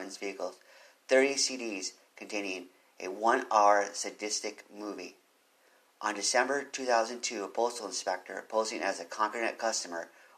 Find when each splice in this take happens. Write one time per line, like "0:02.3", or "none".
none